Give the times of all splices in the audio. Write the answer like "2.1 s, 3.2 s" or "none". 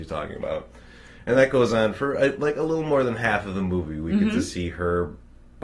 none